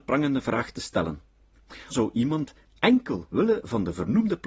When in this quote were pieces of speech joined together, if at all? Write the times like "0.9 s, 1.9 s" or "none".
1.9 s, 3.3 s